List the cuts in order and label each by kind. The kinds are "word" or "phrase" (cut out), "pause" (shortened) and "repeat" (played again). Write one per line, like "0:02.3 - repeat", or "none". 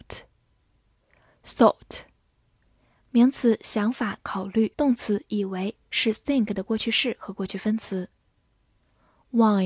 0:04.7 - pause